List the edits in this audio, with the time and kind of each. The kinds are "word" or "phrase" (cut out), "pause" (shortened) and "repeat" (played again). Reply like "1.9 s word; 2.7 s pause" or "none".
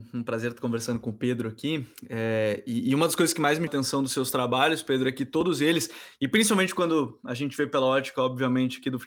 3.7 s word